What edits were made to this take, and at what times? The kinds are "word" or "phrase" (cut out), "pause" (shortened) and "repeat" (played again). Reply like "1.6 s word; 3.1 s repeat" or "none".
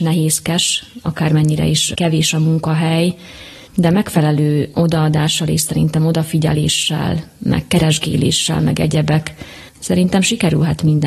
9.7 s pause